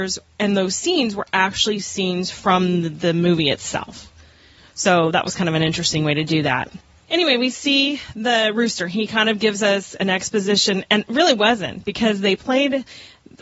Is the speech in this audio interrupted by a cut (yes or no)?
no